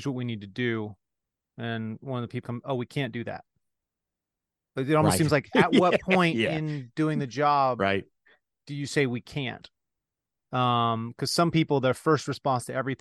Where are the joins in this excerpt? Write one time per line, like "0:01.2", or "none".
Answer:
0:02.4